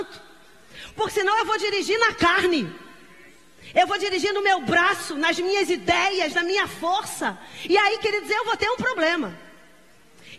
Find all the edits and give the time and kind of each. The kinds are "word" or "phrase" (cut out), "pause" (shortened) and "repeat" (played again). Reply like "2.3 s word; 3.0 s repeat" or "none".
none